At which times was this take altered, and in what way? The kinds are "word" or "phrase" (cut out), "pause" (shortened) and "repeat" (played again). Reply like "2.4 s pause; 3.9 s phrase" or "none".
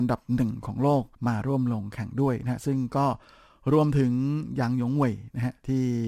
1.1 s pause